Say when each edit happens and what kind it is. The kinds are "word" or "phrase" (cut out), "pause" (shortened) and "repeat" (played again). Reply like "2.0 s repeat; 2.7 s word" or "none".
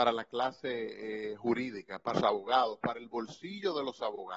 2.1 s word